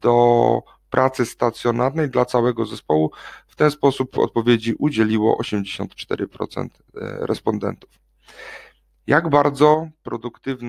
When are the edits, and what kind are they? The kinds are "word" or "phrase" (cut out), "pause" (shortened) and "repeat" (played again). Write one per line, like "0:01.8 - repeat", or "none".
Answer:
none

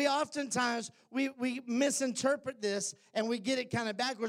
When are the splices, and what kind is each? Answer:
none

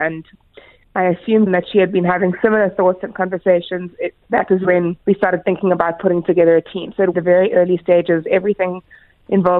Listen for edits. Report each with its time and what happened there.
0:01.5 - word
0:05.0 - pause
0:07.1 - phrase

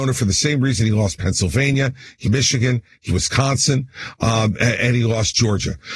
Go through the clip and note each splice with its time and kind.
0:02.2 - word
0:03.1 - word

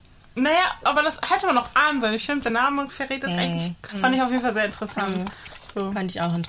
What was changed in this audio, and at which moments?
none

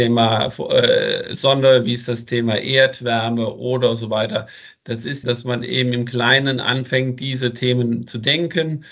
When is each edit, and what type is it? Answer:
0:05.2 - word

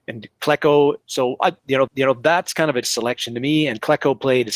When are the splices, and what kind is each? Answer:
0:01.0 - pause
0:01.9 - repeat
0:02.8 - word

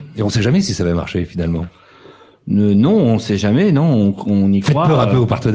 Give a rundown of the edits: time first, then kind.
none

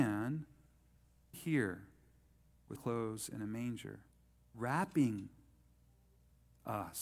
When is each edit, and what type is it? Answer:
0:01.3 - word
0:02.8 - word
0:04.5 - word

